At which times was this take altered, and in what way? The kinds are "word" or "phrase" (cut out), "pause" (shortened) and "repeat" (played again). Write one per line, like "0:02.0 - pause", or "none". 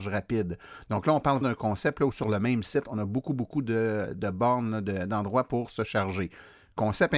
0:01.4 - word